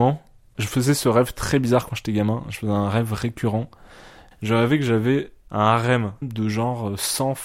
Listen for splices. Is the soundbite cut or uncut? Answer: uncut